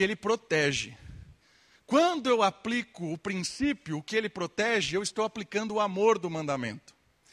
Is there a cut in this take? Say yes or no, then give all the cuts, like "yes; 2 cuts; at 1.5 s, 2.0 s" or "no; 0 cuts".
no; 0 cuts